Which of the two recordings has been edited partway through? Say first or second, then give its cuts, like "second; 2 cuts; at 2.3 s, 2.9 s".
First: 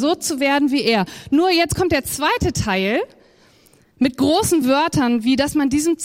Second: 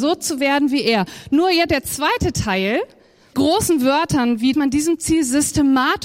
second; 3 cuts; at 1.7 s, 3.3 s, 4.5 s